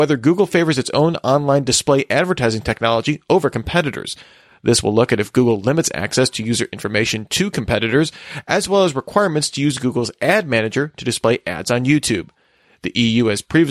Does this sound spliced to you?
no; 0 cuts

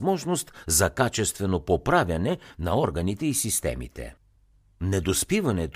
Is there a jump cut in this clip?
no; 0 cuts

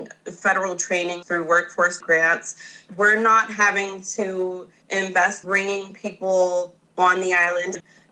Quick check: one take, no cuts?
no; 4 cuts; at 1.2 s, 2.0 s, 2.9 s, 5.4 s

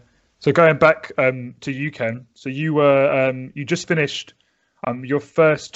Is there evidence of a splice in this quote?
no; 0 cuts

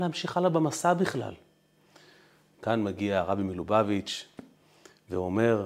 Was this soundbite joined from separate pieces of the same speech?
no; 0 cuts

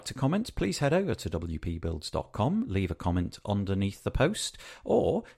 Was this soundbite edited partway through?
no; 0 cuts

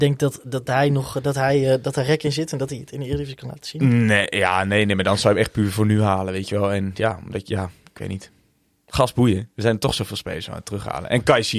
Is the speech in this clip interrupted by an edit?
no; 0 cuts

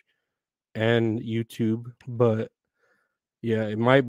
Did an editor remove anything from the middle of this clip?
yes; 1 cut; at 2.0 s

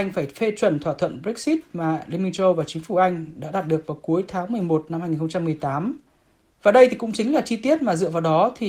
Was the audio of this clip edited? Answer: no; 0 cuts

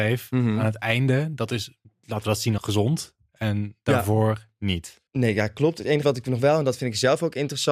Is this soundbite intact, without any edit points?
no; 4 cuts; at 1.8 s, 2.6 s, 5.1 s, 6.0 s

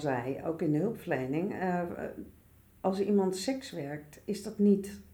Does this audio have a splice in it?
no; 0 cuts

